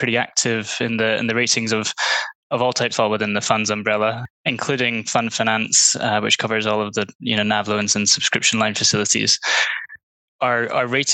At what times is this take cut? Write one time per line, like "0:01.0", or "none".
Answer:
0:02.9